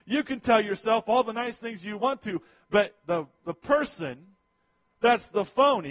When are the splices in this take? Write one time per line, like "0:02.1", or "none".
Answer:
none